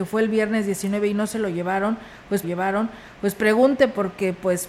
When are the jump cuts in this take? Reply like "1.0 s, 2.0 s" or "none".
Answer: 2.4 s